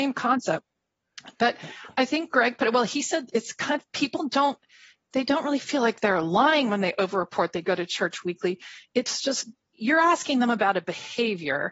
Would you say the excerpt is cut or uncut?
uncut